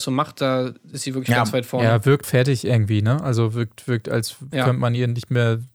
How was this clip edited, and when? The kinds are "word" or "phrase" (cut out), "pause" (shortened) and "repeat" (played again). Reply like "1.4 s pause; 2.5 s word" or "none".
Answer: 2.2 s word